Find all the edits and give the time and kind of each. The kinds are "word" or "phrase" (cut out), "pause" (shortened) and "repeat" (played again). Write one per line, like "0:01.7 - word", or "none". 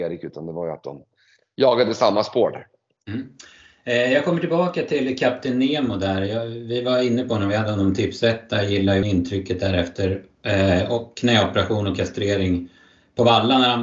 0:09.0 - word